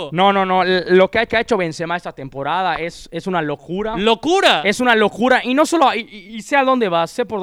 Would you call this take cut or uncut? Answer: cut